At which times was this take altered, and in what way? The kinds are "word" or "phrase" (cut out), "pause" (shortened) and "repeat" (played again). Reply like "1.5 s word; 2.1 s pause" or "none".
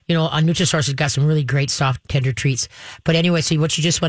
none